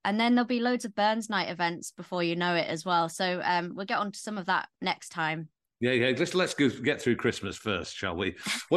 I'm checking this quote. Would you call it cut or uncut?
uncut